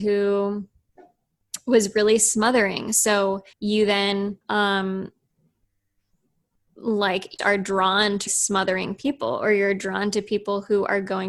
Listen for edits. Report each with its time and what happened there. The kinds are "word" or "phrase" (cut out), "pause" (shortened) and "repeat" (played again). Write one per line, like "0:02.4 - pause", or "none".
0:03.5 - pause
0:04.4 - pause
0:07.4 - phrase
0:08.3 - word